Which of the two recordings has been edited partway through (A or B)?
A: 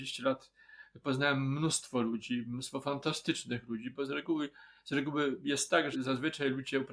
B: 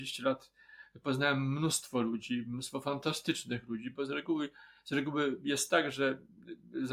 A